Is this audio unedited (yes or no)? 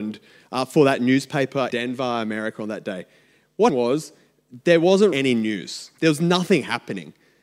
no